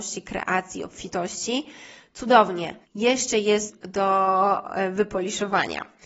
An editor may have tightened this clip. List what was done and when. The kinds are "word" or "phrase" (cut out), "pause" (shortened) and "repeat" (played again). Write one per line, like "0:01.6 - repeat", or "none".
0:02.8 - pause
0:03.7 - word